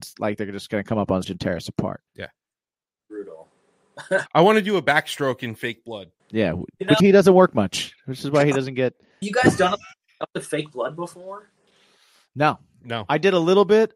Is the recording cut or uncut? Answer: cut